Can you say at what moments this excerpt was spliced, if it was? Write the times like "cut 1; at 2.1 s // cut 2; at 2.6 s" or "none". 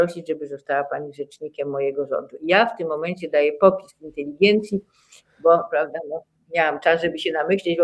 none